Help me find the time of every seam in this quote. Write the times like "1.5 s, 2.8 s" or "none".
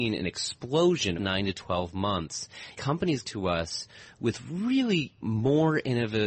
1.2 s, 2.8 s, 3.2 s, 5.2 s